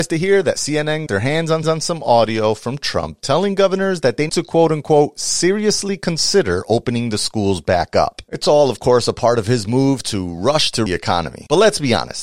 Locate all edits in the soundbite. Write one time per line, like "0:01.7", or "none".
0:01.1
0:01.6
0:04.3
0:10.9